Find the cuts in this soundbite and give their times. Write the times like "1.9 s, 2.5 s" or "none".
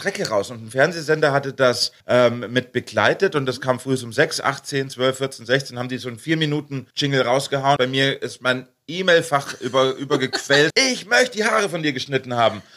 2.0 s, 6.9 s, 7.8 s, 10.7 s